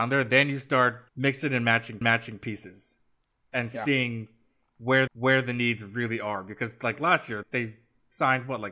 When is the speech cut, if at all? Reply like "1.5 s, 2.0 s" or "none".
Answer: 1.1 s, 2.0 s, 5.1 s, 7.4 s